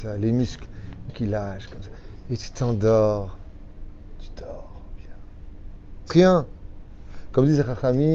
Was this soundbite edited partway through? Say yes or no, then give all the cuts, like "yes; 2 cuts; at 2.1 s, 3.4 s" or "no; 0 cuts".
yes; 3 cuts; at 1.1 s, 5.0 s, 6.1 s